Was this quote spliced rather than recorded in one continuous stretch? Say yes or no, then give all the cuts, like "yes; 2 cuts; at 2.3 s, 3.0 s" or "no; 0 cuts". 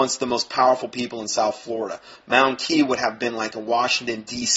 no; 0 cuts